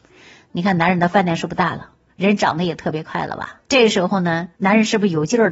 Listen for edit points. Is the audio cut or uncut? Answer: cut